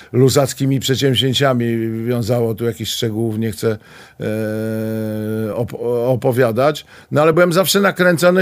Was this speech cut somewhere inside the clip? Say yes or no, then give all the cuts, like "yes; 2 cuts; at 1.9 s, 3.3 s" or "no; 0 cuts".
no; 0 cuts